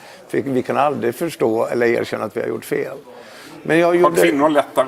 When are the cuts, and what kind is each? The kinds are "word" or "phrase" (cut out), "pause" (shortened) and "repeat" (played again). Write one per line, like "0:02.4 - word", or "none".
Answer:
none